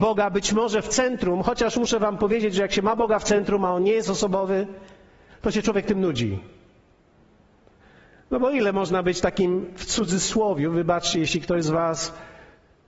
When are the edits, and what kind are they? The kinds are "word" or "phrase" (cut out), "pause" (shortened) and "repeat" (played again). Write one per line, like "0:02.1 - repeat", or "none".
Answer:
none